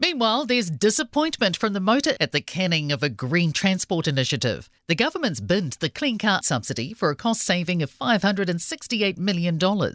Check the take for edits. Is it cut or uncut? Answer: cut